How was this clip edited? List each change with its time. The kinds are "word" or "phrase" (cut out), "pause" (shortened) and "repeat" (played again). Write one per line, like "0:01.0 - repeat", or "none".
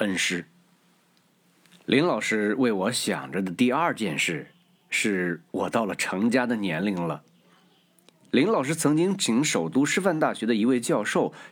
none

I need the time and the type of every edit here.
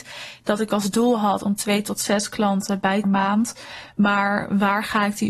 0:03.0 - phrase

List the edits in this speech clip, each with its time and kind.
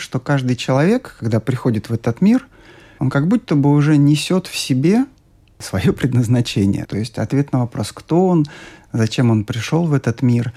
none

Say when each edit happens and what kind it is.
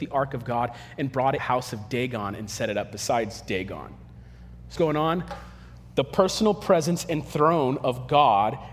0:01.4 - phrase
0:04.8 - word

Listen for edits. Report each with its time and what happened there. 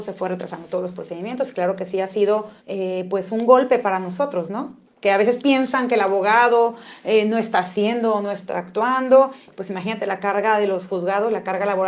0:02.6 - pause
0:04.9 - pause

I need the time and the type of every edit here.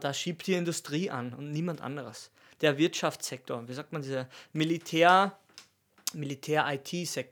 none

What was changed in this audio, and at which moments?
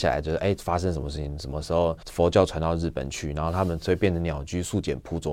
0:02.0 - pause

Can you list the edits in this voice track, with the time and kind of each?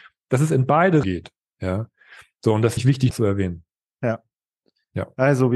0:01.0 - word
0:02.8 - word
0:03.1 - word

